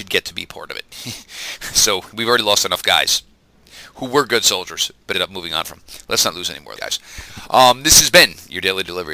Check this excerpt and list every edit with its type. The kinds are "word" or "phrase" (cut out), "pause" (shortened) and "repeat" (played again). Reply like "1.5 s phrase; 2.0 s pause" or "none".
5.1 s word; 6.8 s word